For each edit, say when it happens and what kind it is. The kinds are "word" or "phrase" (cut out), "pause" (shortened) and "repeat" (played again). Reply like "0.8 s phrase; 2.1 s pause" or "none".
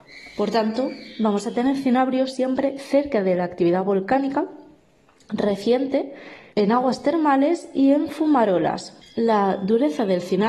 none